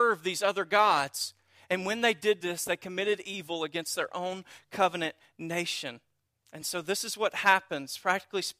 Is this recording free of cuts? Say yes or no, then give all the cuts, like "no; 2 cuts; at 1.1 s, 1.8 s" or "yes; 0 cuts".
yes; 0 cuts